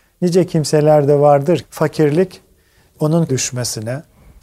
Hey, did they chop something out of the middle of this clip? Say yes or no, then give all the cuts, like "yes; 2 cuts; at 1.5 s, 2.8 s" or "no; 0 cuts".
yes; 2 cuts; at 1.6 s, 3.3 s